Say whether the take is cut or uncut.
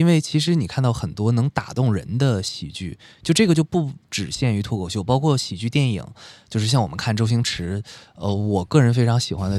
uncut